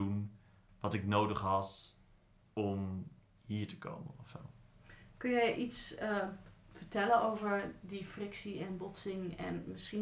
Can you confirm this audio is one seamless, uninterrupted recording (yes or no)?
yes